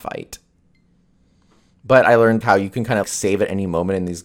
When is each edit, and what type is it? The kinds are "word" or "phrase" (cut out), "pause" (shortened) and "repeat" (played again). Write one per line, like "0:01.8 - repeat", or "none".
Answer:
0:02.4 - word
0:03.0 - word